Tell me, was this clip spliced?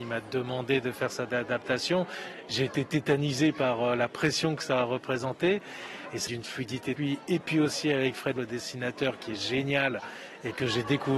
yes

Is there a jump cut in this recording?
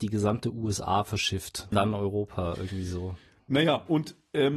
yes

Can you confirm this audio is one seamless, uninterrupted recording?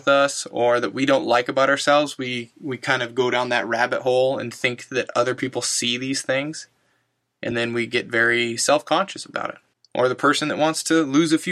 yes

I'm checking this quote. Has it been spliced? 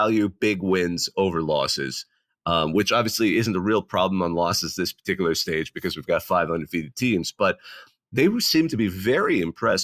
no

